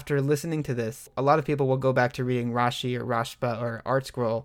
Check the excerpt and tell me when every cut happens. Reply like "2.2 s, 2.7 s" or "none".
none